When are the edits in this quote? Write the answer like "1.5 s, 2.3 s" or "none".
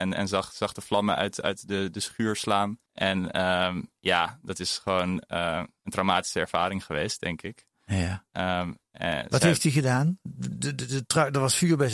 2.8 s

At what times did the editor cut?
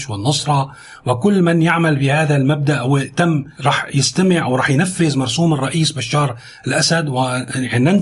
3.6 s

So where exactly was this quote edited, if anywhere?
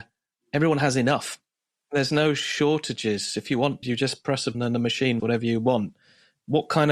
1.5 s, 3.8 s, 4.5 s, 5.2 s

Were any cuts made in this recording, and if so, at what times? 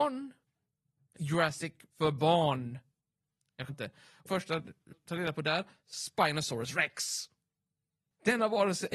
1.1 s, 1.9 s, 3.7 s, 4.3 s, 4.9 s

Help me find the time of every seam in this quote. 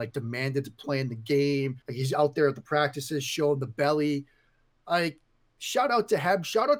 1.8 s

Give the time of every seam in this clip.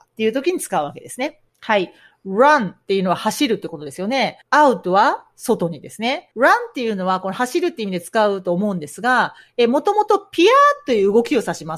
1.5 s, 4.4 s, 6.3 s

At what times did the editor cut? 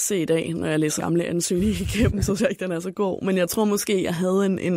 1.0 s, 2.4 s

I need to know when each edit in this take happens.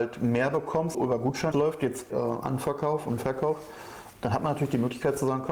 0.9 s, 1.5 s, 2.1 s, 4.1 s

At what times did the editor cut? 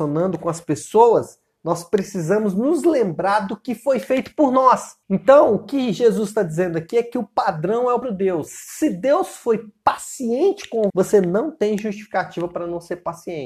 5.0 s, 8.0 s, 10.9 s

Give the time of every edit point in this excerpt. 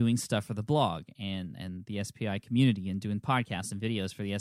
none

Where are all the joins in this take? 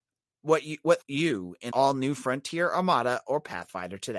1.0 s, 1.7 s

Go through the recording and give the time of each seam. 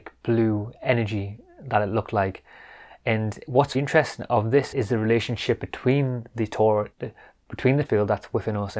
3.7 s, 4.7 s, 6.9 s, 7.8 s

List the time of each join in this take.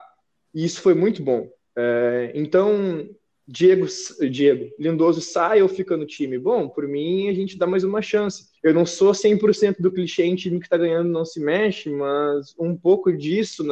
8.6 s

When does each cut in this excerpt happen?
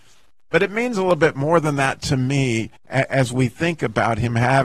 2.8 s

